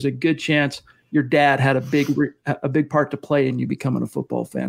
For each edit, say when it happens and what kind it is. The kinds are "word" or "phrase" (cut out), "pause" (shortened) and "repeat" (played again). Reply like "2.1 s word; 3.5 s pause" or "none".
none